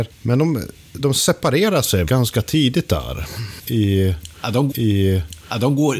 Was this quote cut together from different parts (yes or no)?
yes